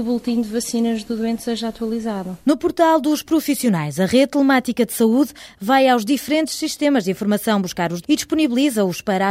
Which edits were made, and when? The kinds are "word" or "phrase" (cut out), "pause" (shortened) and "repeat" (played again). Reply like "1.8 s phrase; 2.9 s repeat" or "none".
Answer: 8.0 s phrase